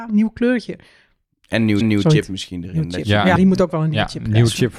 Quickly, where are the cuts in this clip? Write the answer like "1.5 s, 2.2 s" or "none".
1.8 s, 3.4 s

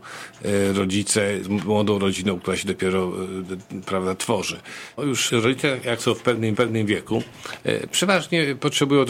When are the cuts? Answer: 1.4 s, 5.0 s, 5.3 s, 6.5 s

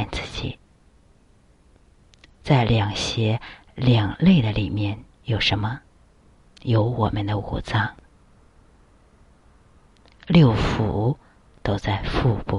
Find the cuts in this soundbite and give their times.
5.1 s, 6.0 s

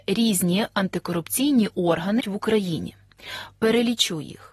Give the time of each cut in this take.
2.2 s

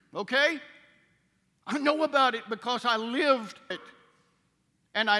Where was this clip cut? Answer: 3.7 s

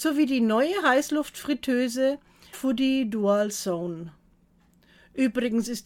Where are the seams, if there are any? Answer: 2.5 s

